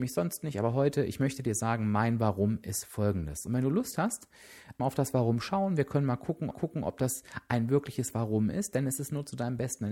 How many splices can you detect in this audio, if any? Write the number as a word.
two